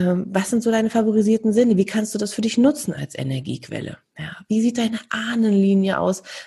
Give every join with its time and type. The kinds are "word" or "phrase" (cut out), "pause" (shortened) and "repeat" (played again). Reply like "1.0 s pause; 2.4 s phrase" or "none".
none